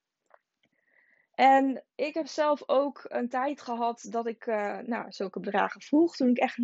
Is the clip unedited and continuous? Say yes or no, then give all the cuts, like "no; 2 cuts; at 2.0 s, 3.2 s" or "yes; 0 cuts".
no; 1 cut; at 1.9 s